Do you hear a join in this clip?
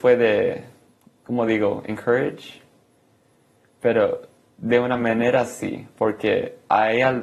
no; 0 cuts

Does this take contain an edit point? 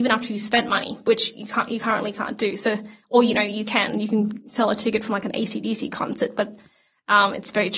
no; 0 cuts

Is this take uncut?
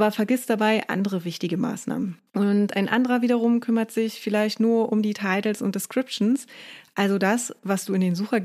no; 1 cut; at 2.3 s

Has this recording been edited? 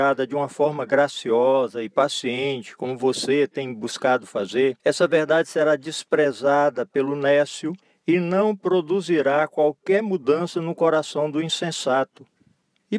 yes; 2 cuts; at 4.8 s, 7.8 s

